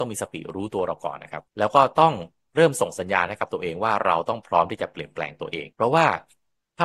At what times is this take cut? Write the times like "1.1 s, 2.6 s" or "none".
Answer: 1.5 s, 5.7 s